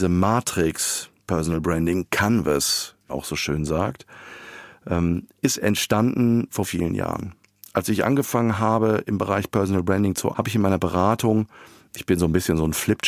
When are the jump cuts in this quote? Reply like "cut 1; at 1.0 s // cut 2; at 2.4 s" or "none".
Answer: cut 1; at 1.2 s // cut 2; at 3.1 s // cut 3; at 6.6 s // cut 4; at 10.3 s